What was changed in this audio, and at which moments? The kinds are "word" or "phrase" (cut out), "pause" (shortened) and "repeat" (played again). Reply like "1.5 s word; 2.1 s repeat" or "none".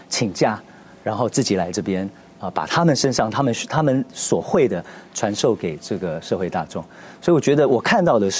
none